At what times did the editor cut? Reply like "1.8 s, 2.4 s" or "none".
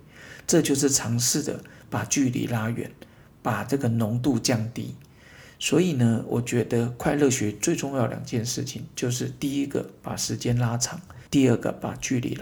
11.3 s